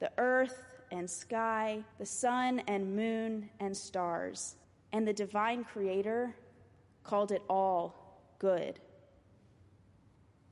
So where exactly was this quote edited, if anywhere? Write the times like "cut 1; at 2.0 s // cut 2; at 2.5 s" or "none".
cut 1; at 1.9 s // cut 2; at 4.6 s

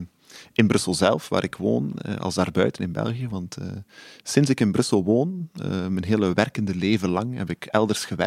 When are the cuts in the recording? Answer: none

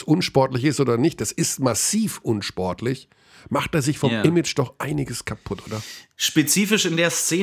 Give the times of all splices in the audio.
none

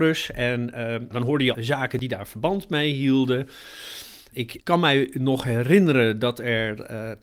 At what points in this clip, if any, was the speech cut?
cut 1; at 1.1 s // cut 2; at 1.5 s // cut 3; at 4.6 s

